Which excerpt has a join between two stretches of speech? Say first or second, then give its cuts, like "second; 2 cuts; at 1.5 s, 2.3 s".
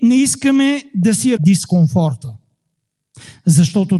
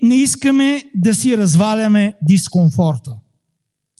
first; 1 cut; at 1.4 s